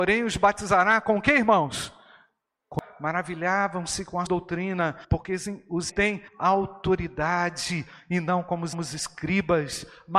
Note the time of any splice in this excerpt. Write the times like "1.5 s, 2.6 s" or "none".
4.3 s, 5.0 s, 5.9 s, 6.3 s, 8.7 s